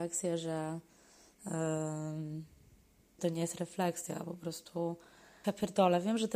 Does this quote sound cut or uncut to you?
cut